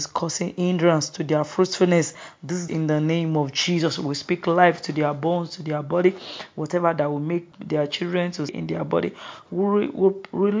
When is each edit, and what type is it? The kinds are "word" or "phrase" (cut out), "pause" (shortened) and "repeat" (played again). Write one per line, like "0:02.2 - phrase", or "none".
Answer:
0:02.7 - phrase
0:07.5 - word
0:08.5 - word